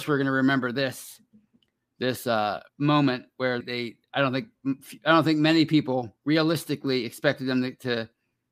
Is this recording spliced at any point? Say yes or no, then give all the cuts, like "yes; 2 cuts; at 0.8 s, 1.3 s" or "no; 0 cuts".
yes; 3 cuts; at 2.7 s, 3.6 s, 6.2 s